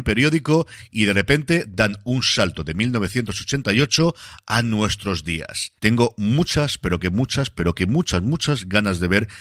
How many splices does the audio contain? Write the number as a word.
zero